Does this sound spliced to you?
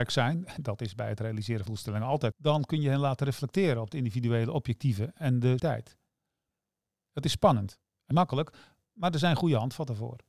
yes; 4 cuts; at 1.7 s, 2.3 s, 5.6 s, 8.1 s

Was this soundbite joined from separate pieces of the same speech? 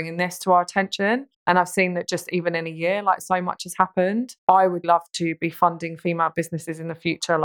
yes; 3 cuts; at 1.3 s, 4.4 s, 4.8 s

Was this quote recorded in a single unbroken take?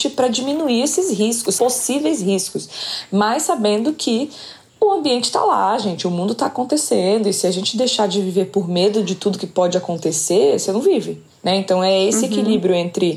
no; 1 cut; at 1.6 s

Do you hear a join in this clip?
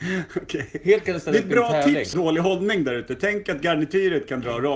yes; 2 cuts; at 1.1 s, 2.1 s

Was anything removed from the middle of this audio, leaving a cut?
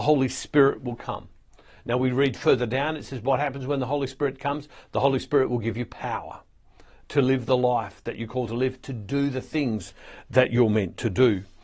no; 0 cuts

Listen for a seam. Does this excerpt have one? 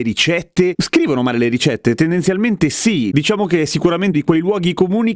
yes; 1 cut; at 4.1 s

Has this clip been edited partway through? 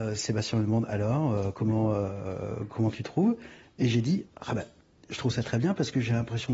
no; 0 cuts

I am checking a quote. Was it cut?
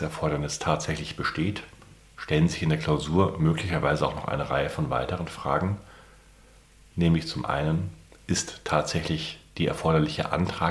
no; 0 cuts

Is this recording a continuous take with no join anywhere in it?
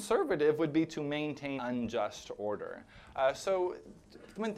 no; 1 cut; at 1.6 s

